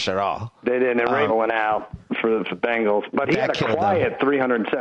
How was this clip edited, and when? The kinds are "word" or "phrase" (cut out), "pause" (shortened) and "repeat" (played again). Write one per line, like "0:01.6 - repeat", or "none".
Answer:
0:01.3 - phrase
0:02.5 - word